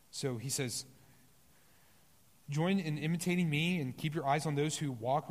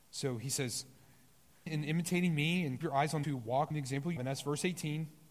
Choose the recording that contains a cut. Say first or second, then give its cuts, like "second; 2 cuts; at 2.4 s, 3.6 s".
second; 5 cuts; at 1.7 s, 2.8 s, 3.2 s, 3.7 s, 4.2 s